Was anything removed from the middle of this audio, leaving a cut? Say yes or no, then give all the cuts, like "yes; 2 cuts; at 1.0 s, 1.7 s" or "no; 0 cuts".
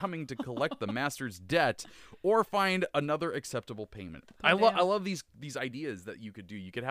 no; 0 cuts